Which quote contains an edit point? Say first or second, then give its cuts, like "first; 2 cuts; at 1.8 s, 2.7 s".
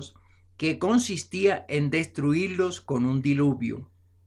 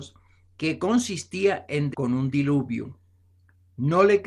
second; 1 cut; at 1.9 s